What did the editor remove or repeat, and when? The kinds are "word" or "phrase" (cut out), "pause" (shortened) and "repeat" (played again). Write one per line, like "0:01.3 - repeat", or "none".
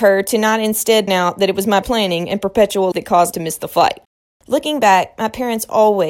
0:01.1 - word
0:01.8 - word
0:02.9 - word
0:03.3 - word